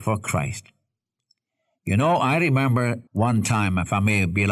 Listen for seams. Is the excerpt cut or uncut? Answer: cut